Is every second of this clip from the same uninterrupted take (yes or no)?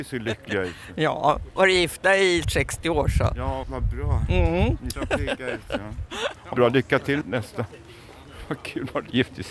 no